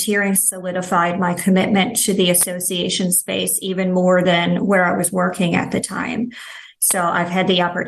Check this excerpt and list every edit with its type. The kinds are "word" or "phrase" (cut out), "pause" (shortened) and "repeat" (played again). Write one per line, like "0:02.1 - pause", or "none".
none